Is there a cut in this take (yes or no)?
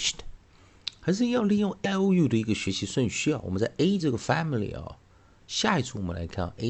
yes